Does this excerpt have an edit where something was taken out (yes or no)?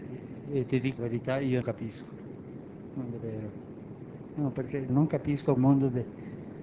yes